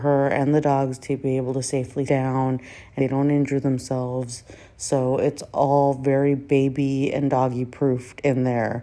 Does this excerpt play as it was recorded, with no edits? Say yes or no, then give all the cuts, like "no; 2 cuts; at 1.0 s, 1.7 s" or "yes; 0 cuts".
no; 2 cuts; at 2.1 s, 3.0 s